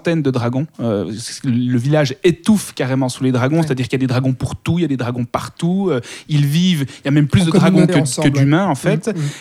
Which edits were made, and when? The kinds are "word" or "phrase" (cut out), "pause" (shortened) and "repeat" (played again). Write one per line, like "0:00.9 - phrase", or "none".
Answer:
0:07.9 - word